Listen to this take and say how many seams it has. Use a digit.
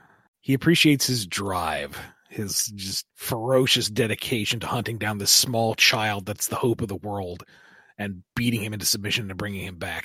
1